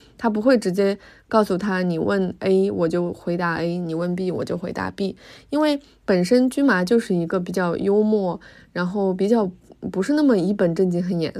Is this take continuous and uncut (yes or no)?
yes